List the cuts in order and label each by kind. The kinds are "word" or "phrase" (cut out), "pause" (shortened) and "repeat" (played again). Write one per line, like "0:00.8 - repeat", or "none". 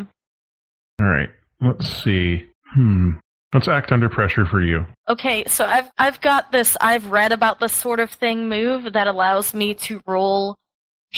0:05.0 - pause
0:05.9 - pause